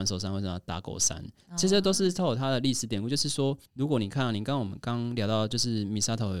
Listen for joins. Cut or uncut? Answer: cut